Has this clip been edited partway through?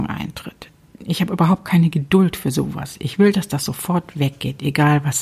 no; 0 cuts

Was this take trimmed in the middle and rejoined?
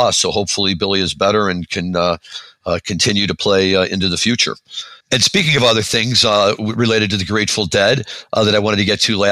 yes; 1 cut; at 5.0 s

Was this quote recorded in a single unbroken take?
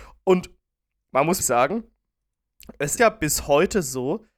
no; 2 cuts; at 1.4 s, 3.0 s

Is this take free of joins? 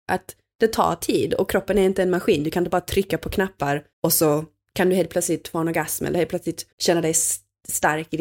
no; 2 cuts; at 3.9 s, 6.7 s

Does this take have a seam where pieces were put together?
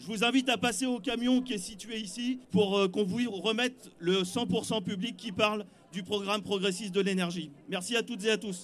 yes; 1 cut; at 2.4 s

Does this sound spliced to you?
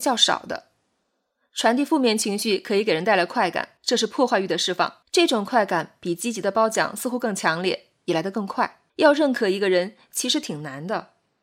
yes; 3 cuts; at 3.8 s, 5.0 s, 8.9 s

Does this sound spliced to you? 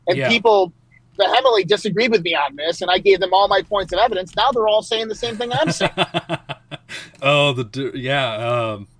yes; 1 cut; at 7.1 s

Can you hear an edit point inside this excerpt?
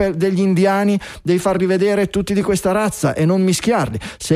no; 0 cuts

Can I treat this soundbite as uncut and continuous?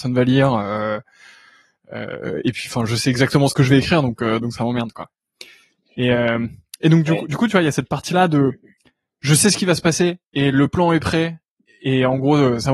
yes; 0 cuts

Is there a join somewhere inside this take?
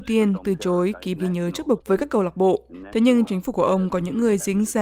yes; 3 cuts; at 1.2 s, 1.8 s, 3.3 s

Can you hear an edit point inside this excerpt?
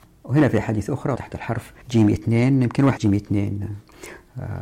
yes; 3 cuts; at 1.2 s, 1.8 s, 3.0 s

